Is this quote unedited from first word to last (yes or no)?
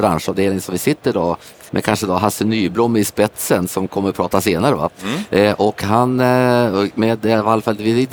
no